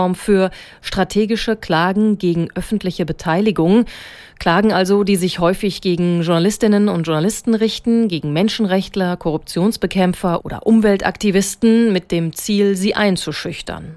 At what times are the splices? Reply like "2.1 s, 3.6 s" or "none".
none